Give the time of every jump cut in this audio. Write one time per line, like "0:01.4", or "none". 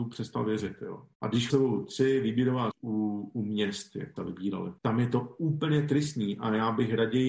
0:01.1
0:01.5
0:02.7
0:04.2
0:04.8